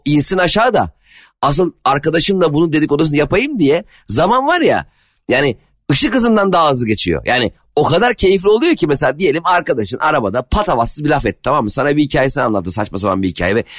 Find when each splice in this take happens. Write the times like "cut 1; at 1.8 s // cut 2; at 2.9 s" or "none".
none